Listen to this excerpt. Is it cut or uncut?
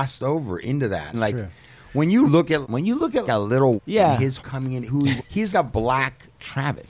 cut